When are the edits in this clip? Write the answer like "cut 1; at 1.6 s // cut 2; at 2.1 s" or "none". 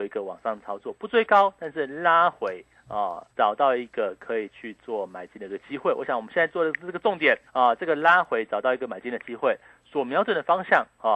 cut 1; at 3.3 s // cut 2; at 7.5 s